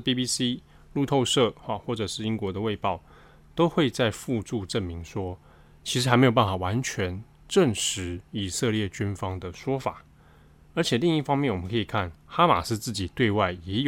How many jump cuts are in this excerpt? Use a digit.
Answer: 1